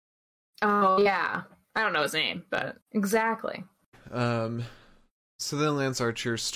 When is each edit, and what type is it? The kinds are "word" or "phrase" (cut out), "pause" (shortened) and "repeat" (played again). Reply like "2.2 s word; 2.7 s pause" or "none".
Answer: 2.8 s pause